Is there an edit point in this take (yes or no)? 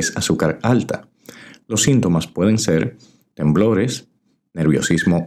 no